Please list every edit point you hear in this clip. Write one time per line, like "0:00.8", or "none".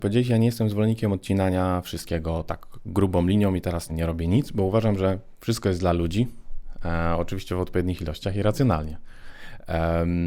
0:03.9